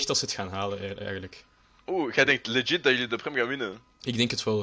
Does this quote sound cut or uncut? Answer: uncut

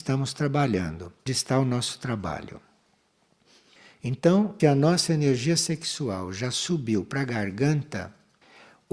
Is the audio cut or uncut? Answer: cut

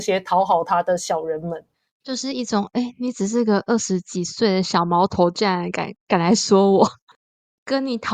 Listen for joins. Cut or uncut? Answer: cut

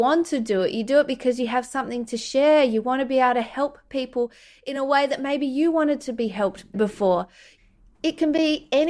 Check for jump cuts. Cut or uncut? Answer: uncut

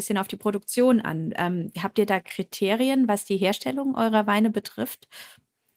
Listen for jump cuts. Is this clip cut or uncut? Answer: uncut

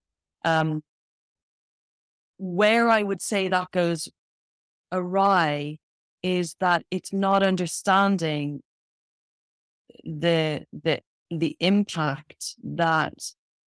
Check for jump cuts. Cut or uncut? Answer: uncut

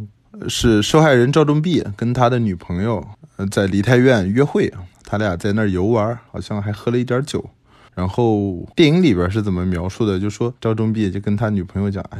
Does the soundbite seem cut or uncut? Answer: cut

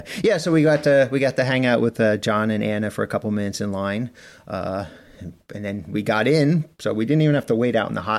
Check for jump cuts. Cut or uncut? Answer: uncut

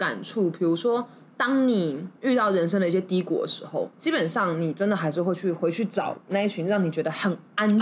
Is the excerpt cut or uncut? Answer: cut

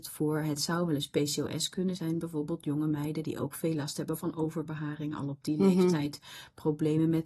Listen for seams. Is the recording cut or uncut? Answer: cut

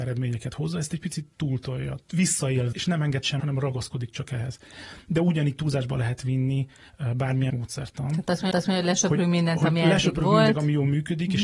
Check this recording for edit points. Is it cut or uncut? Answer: cut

